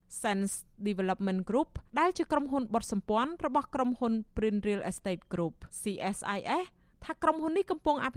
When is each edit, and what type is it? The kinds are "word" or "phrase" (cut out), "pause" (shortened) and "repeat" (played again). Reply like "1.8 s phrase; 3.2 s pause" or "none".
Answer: 1.9 s pause; 5.7 s pause